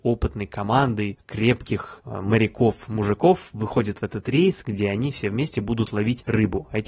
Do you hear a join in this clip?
no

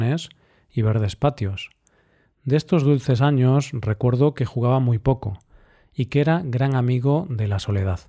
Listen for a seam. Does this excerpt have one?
no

